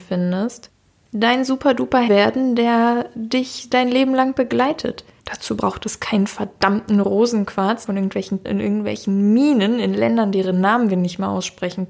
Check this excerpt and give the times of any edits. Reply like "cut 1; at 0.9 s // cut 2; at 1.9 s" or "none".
cut 1; at 2.1 s // cut 2; at 5.2 s // cut 3; at 7.9 s // cut 4; at 8.4 s